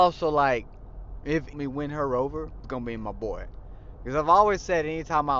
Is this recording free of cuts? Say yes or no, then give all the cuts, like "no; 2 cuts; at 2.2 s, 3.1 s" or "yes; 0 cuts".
no; 2 cuts; at 1.5 s, 2.6 s